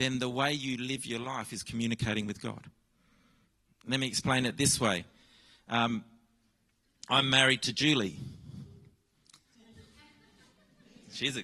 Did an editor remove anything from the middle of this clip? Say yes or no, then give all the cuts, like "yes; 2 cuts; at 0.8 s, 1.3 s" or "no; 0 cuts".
no; 0 cuts